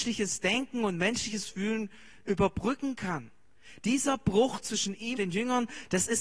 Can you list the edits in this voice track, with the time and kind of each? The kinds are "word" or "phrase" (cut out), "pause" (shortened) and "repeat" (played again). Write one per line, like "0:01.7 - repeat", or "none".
0:05.2 - word